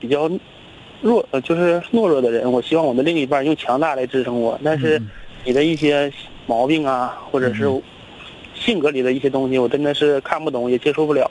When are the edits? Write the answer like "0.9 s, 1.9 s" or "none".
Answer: none

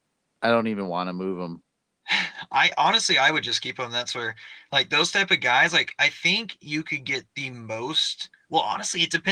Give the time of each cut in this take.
none

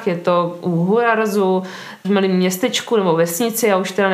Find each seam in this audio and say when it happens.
2.0 s

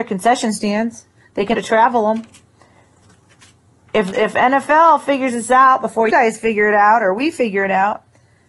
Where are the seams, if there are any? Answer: 1.5 s, 4.1 s, 6.1 s

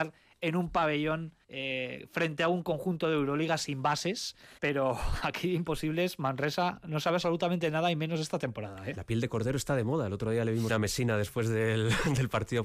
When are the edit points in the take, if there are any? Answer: 1.4 s, 4.6 s, 10.7 s

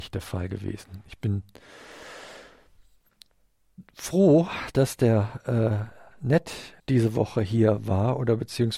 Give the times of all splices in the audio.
6.8 s

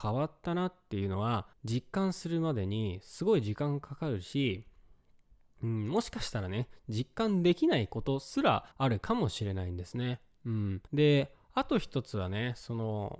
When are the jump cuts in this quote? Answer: 1.5 s, 8.7 s, 10.9 s

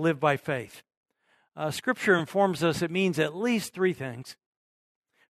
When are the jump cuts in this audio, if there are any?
none

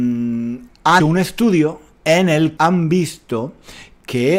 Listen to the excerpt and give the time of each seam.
1.0 s, 2.6 s

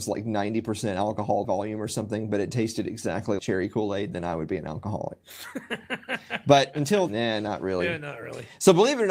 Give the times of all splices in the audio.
1.4 s, 3.4 s, 7.1 s

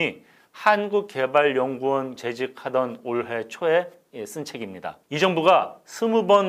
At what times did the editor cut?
2.2 s, 5.0 s

